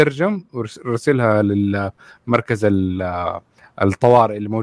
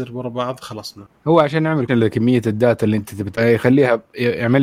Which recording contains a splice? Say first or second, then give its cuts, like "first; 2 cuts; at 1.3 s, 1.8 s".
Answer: second; 2 cuts; at 1.9 s, 3.3 s